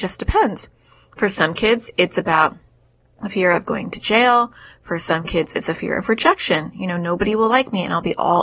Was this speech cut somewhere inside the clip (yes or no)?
no